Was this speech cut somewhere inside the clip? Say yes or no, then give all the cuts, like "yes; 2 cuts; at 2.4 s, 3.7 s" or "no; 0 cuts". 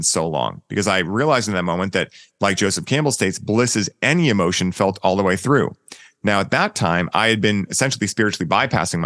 no; 0 cuts